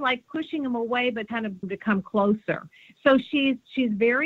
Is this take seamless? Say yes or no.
no